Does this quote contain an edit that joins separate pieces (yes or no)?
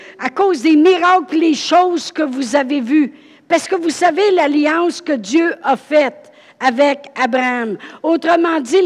no